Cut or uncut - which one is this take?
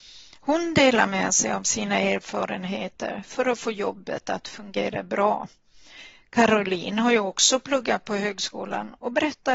uncut